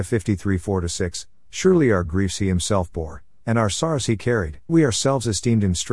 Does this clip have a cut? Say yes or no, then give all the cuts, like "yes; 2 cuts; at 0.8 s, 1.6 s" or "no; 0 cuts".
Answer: yes; 1 cut; at 4.7 s